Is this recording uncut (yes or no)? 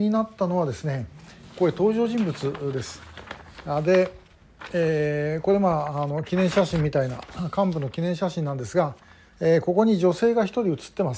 yes